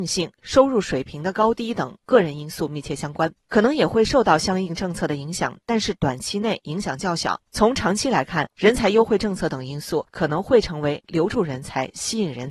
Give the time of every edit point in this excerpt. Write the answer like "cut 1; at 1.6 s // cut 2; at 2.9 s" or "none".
cut 1; at 10.1 s